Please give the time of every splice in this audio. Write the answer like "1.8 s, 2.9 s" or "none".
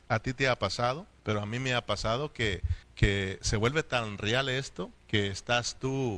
1.2 s, 2.8 s, 5.0 s